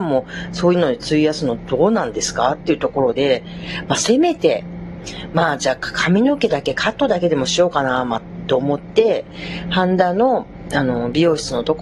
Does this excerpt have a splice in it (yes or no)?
no